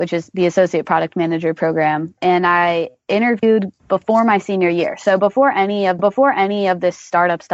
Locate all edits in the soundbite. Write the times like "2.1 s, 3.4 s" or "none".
6.0 s